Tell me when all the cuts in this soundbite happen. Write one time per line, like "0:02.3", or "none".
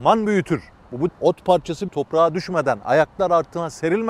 0:01.1
0:01.9